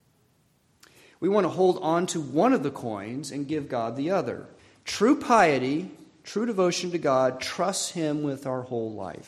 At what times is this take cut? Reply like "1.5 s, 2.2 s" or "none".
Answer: 4.6 s